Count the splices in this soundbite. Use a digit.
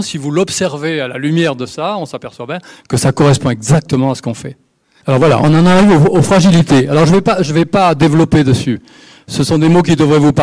0